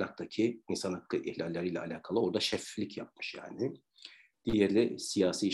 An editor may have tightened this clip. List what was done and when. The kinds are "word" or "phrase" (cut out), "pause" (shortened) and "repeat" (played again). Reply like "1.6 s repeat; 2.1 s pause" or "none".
none